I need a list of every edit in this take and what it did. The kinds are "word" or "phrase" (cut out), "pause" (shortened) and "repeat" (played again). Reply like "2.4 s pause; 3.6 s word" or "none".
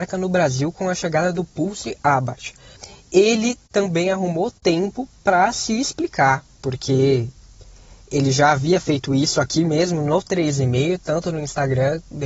none